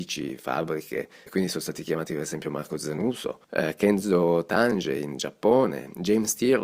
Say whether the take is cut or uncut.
cut